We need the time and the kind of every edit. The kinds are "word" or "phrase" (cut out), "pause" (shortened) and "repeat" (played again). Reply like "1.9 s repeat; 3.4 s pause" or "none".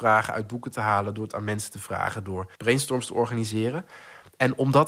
2.6 s pause

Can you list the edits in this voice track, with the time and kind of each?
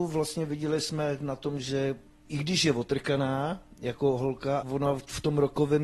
2.1 s pause; 4.6 s word

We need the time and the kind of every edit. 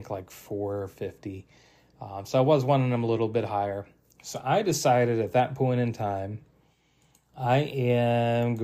none

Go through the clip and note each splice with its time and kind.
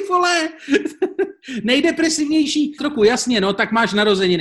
2.8 s word

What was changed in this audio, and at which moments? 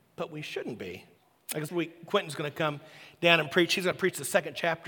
1.2 s pause; 1.7 s phrase

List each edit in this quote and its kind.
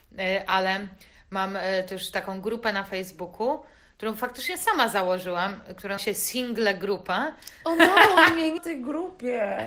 6.0 s word; 8.6 s word

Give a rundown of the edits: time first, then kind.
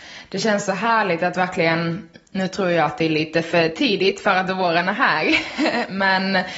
none

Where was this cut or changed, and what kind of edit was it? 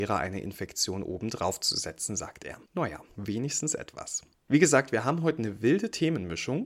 2.6 s pause; 4.3 s pause

